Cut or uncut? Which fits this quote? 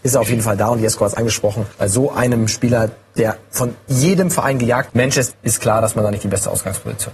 cut